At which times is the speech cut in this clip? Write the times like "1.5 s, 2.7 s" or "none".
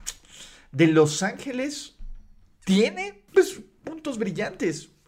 3.3 s